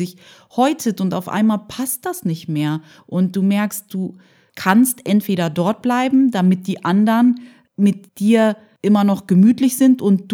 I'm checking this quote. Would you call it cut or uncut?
uncut